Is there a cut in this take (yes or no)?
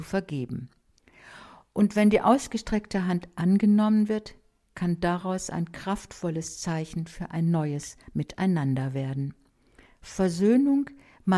no